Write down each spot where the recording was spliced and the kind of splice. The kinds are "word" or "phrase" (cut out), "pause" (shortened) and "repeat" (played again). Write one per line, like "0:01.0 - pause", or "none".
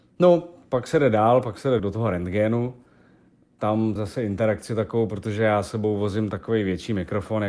0:01.8 - word
0:04.0 - phrase